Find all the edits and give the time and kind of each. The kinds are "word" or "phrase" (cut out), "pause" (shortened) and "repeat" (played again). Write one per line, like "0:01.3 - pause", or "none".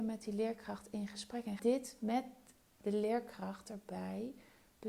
0:01.6 - word